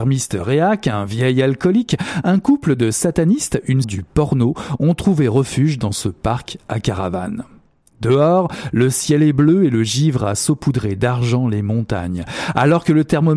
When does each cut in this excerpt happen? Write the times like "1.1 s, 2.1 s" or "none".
3.8 s